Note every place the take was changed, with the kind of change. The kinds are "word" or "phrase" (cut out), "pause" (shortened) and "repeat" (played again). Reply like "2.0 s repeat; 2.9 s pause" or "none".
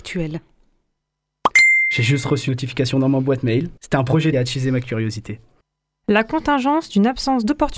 2.5 s word; 3.8 s pause; 4.3 s phrase; 5.6 s pause